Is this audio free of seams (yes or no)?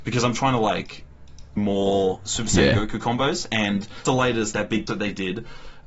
no